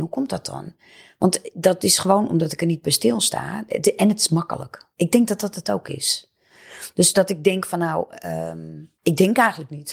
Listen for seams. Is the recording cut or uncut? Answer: cut